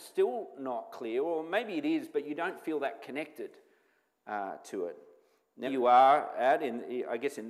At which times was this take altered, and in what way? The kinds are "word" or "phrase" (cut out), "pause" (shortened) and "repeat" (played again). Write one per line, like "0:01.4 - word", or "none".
0:05.7 - word